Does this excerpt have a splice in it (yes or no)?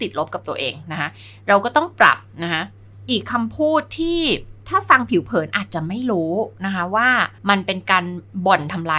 yes